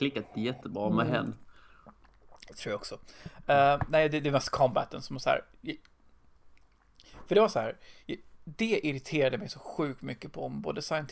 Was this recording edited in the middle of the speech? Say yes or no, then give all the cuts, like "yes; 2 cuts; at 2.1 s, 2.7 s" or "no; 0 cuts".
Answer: no; 0 cuts